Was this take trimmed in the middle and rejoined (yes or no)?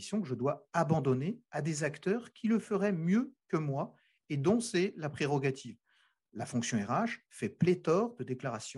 no